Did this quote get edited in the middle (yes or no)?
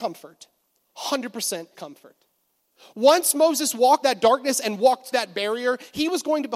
yes